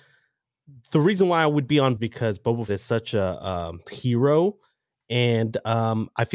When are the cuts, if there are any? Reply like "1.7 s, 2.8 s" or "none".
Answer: 2.0 s, 2.7 s, 3.8 s

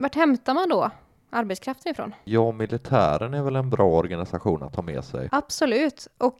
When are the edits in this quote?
none

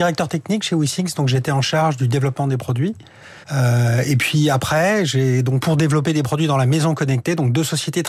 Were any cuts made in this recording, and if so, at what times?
3.4 s, 5.6 s

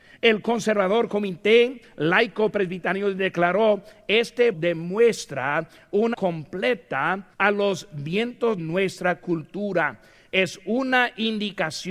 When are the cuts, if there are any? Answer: 4.5 s, 6.1 s, 7.3 s, 8.6 s

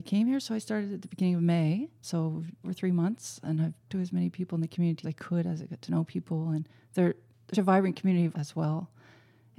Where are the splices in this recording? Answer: 2.0 s, 2.6 s, 3.9 s, 5.0 s, 7.5 s, 8.3 s

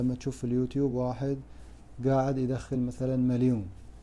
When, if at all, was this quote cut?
none

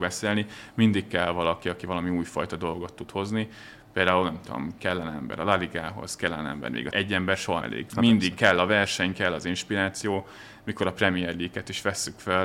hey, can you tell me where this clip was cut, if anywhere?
6.9 s, 7.6 s

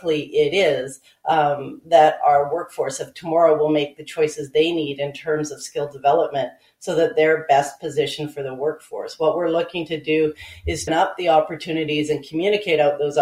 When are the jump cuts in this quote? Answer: 10.9 s

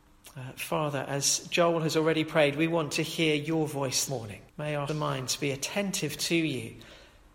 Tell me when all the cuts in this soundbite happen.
4.1 s, 4.5 s, 4.9 s

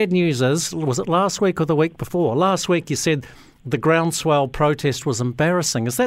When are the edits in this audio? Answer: none

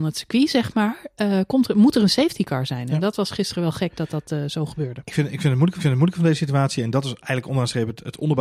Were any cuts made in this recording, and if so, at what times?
5.8 s

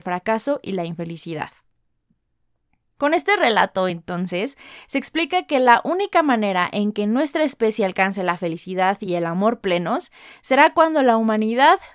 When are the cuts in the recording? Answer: none

